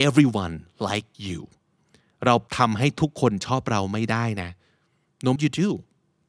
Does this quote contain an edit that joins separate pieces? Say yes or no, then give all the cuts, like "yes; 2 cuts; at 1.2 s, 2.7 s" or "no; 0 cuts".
yes; 3 cuts; at 1.1 s, 2.5 s, 5.4 s